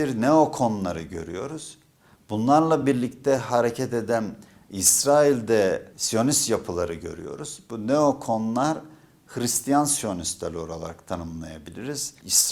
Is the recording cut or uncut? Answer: uncut